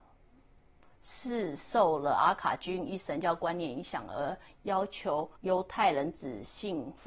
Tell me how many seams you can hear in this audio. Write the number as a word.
one